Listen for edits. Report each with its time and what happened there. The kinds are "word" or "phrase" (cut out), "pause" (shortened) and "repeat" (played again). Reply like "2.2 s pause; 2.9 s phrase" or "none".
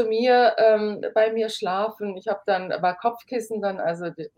none